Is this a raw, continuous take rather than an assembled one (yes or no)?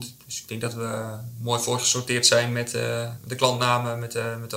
yes